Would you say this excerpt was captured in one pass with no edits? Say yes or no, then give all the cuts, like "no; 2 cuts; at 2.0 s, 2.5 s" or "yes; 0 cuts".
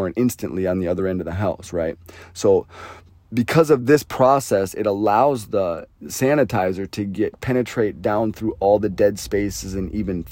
yes; 0 cuts